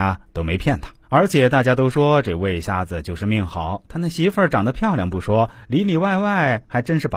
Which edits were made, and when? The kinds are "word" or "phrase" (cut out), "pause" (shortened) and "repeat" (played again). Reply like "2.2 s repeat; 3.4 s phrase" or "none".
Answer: 1.0 s pause